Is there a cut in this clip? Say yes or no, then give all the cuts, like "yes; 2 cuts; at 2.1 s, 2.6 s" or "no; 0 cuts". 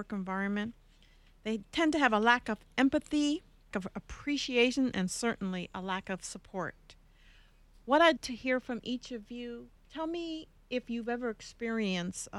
yes; 3 cuts; at 3.7 s, 8.2 s, 9.8 s